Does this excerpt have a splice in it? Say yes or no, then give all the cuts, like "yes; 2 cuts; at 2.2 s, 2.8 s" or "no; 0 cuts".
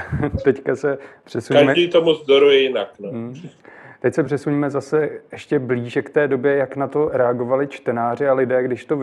no; 0 cuts